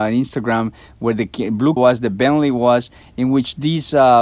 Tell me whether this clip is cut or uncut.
cut